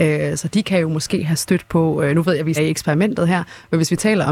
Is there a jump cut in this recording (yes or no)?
yes